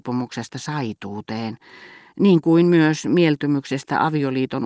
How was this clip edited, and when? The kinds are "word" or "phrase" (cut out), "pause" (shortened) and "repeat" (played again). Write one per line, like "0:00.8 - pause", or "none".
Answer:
none